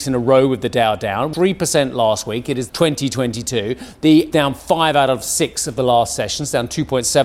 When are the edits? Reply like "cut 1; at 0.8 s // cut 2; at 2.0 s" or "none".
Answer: cut 1; at 1.3 s // cut 2; at 2.7 s // cut 3; at 4.3 s